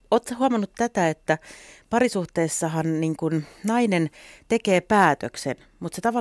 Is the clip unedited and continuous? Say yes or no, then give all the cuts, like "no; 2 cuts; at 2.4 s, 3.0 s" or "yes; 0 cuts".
yes; 0 cuts